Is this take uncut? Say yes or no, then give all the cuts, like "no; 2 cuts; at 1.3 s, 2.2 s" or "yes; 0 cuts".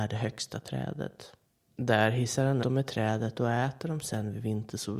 no; 2 cuts; at 1.6 s, 2.6 s